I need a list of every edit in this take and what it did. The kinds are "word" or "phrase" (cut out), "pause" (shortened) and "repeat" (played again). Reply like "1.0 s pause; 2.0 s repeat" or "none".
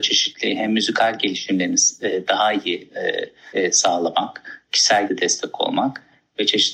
3.5 s pause; 5.1 s word